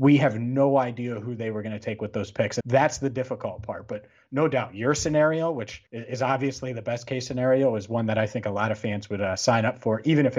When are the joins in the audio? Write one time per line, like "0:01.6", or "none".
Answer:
0:02.6
0:05.9